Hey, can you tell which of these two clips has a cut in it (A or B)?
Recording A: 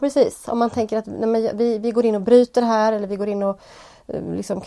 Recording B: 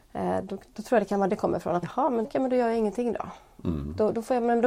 B